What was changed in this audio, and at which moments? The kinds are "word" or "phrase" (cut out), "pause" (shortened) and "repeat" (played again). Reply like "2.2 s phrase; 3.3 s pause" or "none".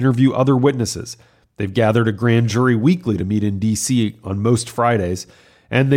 none